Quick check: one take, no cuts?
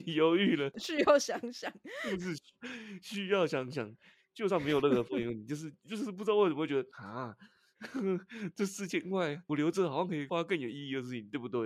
yes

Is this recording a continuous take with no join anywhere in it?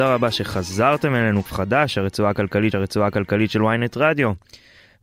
no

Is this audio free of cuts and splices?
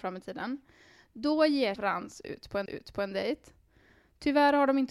no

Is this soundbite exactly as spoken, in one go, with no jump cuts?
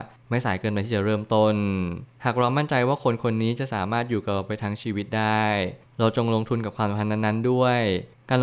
yes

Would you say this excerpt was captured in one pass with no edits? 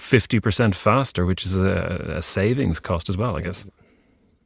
yes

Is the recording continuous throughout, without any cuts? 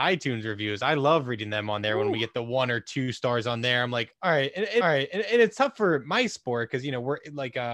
no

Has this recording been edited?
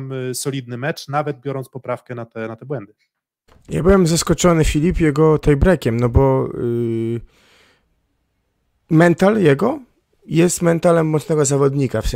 no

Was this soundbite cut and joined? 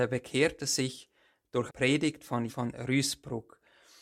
yes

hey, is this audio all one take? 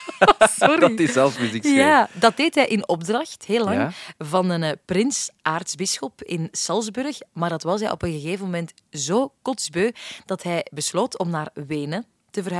yes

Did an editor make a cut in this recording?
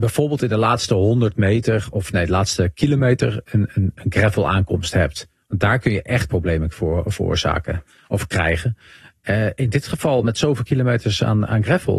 no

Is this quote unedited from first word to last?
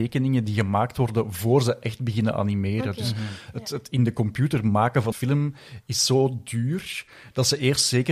no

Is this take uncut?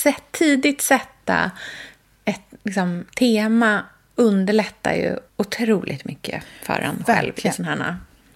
no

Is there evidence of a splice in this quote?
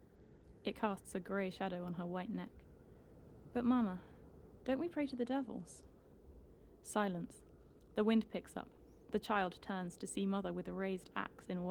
no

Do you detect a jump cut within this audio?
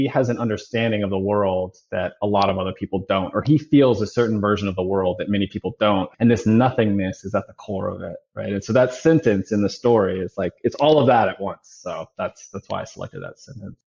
yes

